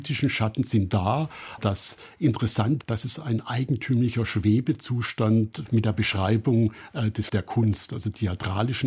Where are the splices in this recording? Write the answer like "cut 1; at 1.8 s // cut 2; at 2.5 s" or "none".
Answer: cut 1; at 1.6 s // cut 2; at 2.8 s // cut 3; at 5.7 s // cut 4; at 7.3 s